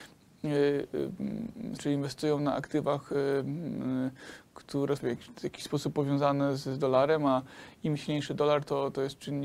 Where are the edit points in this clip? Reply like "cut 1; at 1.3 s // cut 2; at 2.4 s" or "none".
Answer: cut 1; at 1.8 s // cut 2; at 5.0 s